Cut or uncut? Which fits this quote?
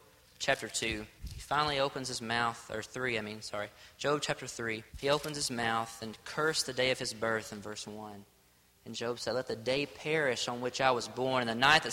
cut